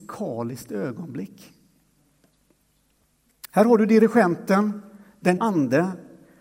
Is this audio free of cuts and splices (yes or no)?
no